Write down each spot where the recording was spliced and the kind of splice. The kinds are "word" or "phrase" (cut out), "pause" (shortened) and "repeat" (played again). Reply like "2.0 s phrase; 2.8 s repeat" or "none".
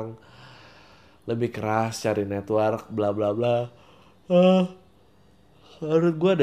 none